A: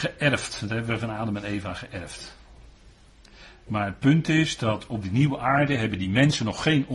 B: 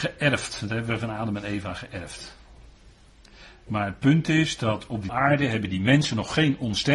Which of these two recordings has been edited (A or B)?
B